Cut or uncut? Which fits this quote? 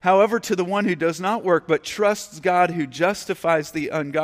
uncut